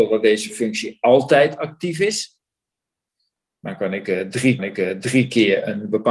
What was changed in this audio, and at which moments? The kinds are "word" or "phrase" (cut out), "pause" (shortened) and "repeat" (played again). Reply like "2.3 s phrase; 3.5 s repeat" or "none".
4.6 s repeat

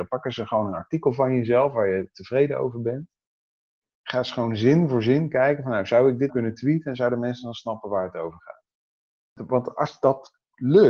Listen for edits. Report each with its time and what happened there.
6.3 s word

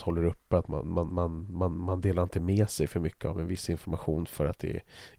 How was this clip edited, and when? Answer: 1.1 s word

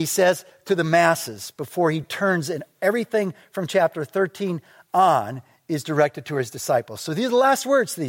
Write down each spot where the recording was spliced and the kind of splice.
none

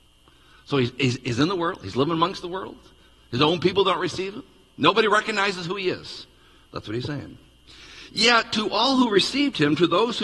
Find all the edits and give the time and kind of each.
none

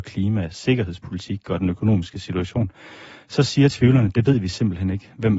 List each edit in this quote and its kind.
none

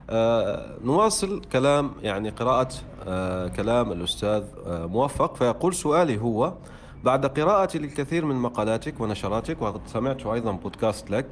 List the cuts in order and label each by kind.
none

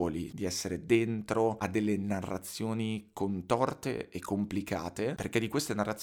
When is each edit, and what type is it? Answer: none

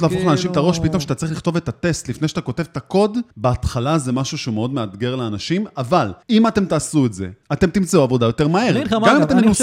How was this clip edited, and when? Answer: 3.3 s pause; 6.2 s pause; 7.4 s pause

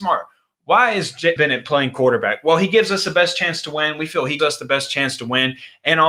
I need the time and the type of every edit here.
1.4 s word; 4.4 s word

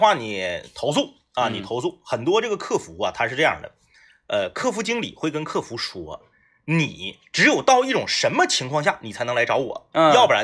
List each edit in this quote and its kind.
none

